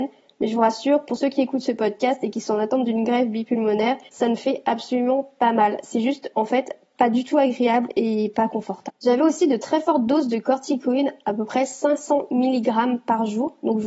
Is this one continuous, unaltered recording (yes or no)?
no